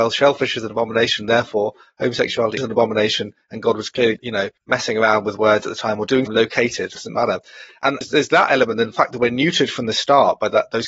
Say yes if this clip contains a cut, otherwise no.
yes